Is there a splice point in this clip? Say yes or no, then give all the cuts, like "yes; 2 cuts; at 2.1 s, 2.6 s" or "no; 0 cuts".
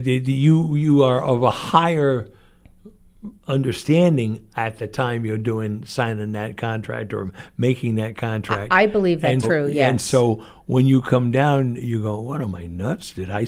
yes; 1 cut; at 9.4 s